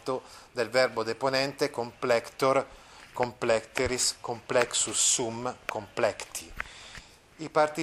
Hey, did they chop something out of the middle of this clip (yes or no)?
no